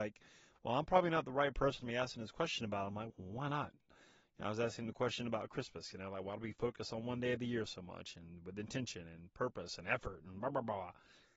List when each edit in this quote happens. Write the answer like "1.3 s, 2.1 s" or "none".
3.1 s